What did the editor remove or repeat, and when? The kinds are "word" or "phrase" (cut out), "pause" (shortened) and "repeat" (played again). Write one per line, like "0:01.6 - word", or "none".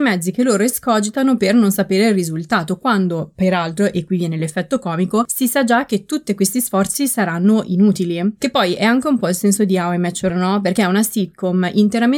0:10.3 - word